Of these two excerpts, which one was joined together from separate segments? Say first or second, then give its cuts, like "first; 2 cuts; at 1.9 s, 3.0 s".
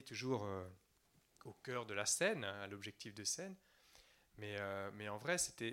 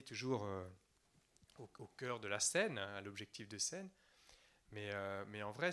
first; 1 cut; at 1.4 s